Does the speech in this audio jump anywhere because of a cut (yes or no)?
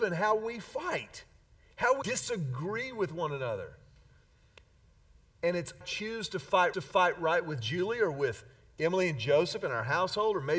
yes